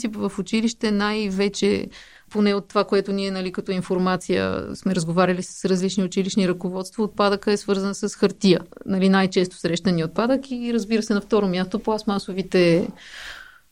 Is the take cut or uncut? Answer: uncut